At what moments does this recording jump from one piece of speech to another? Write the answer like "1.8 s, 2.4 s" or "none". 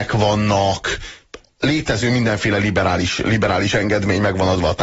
none